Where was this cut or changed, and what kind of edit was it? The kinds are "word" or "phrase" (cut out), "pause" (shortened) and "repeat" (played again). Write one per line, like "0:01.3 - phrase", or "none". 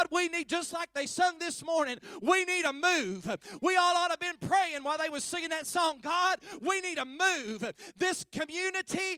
none